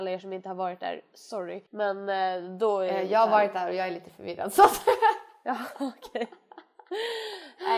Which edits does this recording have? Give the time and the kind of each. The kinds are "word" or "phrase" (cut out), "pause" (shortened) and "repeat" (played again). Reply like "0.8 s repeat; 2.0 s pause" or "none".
1.7 s pause